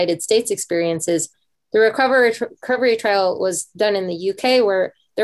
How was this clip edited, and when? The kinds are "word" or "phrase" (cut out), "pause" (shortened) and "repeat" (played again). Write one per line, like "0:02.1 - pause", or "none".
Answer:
none